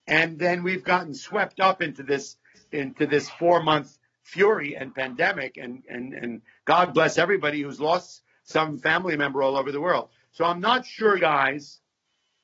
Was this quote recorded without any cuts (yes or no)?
no